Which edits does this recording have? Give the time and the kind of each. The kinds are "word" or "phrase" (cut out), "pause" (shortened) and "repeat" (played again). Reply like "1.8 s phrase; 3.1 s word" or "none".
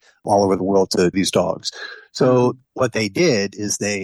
1.1 s word

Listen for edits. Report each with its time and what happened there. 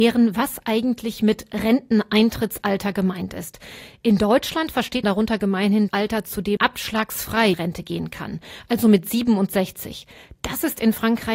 5.0 s word; 5.9 s word; 6.6 s word; 7.5 s word

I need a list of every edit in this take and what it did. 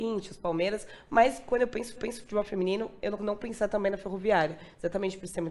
2.0 s repeat; 3.2 s word

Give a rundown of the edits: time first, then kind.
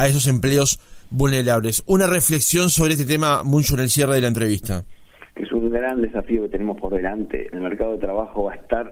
5.3 s pause

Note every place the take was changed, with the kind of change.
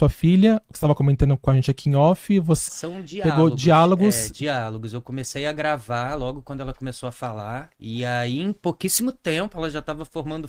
2.7 s word; 7.7 s pause

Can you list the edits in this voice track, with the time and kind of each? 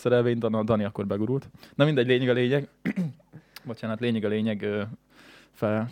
none

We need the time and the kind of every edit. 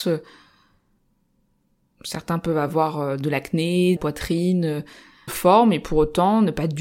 4.0 s word; 5.3 s phrase

